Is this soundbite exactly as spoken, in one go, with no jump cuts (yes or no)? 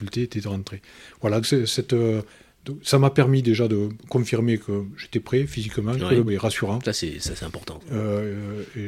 no